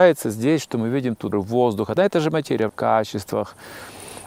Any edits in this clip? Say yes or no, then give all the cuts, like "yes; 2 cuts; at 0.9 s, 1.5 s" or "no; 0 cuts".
yes; 3 cuts; at 1.3 s, 2.0 s, 2.7 s